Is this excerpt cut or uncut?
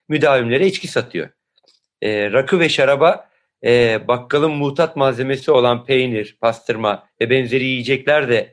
uncut